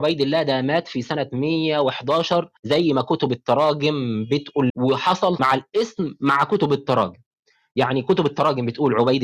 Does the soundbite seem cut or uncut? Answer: cut